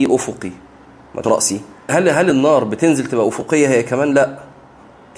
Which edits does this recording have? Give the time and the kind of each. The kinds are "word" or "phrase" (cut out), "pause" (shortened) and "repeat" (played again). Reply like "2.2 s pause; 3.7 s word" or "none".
1.2 s word; 1.9 s word